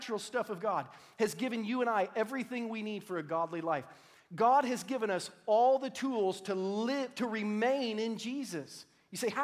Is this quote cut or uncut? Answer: uncut